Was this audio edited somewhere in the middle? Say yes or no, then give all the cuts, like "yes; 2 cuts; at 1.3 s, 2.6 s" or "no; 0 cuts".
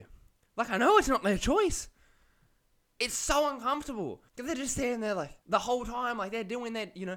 yes; 2 cuts; at 4.3 s, 5.4 s